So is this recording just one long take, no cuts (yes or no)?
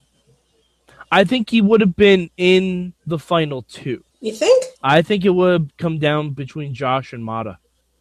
no